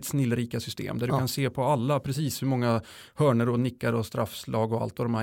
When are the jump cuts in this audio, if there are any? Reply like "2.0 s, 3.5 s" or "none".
none